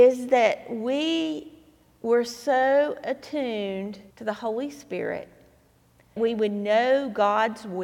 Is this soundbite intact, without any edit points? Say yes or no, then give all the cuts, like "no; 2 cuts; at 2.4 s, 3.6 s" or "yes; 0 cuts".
no; 2 cuts; at 4.1 s, 6.2 s